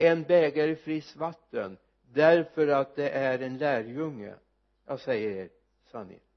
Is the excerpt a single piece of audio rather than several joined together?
yes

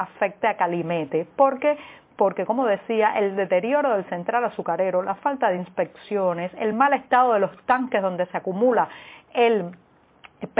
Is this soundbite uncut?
yes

